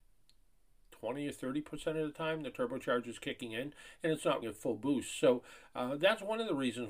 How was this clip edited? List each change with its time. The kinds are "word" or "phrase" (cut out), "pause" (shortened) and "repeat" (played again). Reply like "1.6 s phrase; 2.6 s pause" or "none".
4.4 s word